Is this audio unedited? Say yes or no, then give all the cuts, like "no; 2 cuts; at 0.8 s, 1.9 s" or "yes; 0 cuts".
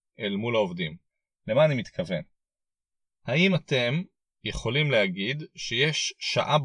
yes; 0 cuts